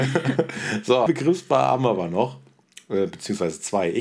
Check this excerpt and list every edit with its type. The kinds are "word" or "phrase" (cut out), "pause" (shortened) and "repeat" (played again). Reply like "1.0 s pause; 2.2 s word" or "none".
1.1 s word